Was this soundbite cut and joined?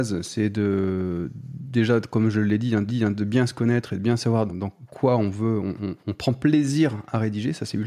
yes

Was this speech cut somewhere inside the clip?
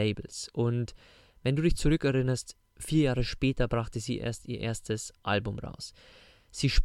no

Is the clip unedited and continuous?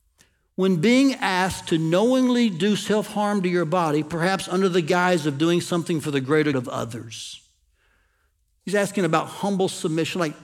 no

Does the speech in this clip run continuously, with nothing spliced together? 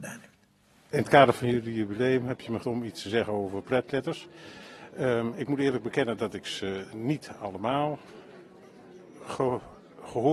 no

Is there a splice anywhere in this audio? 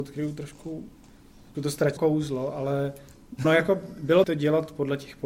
yes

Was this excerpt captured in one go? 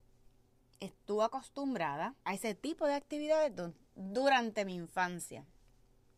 no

